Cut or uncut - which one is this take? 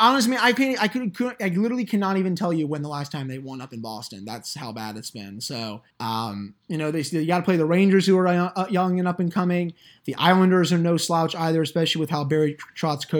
cut